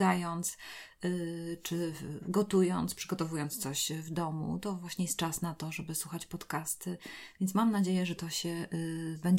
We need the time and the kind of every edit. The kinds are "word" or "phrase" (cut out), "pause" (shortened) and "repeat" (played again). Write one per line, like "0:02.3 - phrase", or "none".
none

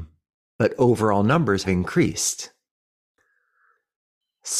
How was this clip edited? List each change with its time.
0:01.6 - word

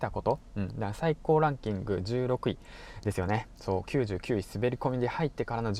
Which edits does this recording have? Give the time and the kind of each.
0:03.6 - phrase

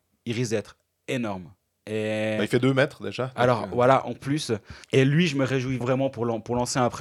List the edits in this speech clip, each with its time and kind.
0:04.8 - pause
0:05.8 - word

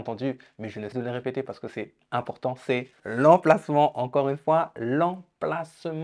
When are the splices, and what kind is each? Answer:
0:00.9 - word
0:03.0 - word

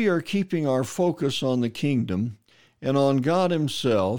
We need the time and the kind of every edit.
none

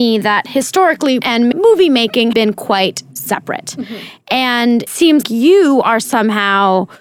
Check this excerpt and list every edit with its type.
0:01.2 - word
0:01.5 - word
0:02.3 - word
0:04.9 - word
0:05.2 - word

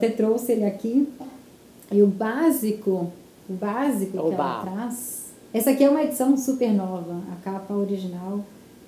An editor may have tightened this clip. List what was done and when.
none

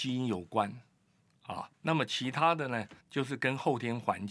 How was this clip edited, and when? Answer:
0:01.7 - pause
0:03.0 - pause

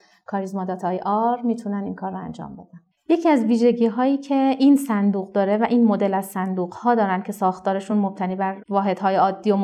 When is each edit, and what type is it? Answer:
none

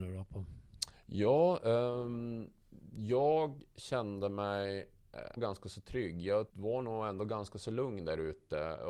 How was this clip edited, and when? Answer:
0:05.4 - word
0:06.5 - pause

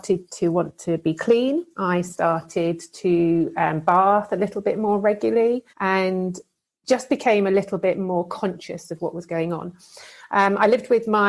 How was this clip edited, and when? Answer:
0:01.7 - pause
0:05.7 - pause

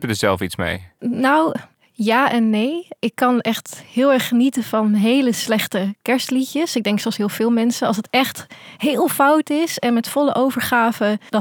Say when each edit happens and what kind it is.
none

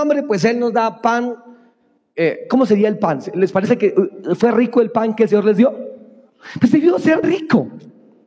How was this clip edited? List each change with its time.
0:07.2 - word

